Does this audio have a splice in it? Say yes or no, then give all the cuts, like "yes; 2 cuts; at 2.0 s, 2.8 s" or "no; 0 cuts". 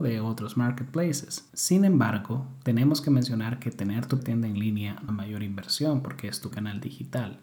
yes; 4 cuts; at 1.5 s, 4.2 s, 5.1 s, 6.5 s